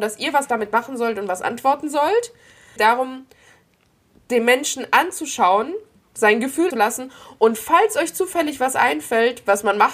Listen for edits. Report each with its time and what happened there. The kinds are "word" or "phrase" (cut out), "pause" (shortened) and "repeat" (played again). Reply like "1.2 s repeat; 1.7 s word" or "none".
2.8 s phrase; 6.7 s phrase